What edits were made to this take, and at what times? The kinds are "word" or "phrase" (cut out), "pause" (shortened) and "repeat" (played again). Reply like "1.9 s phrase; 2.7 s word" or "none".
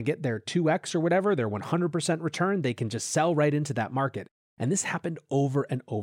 none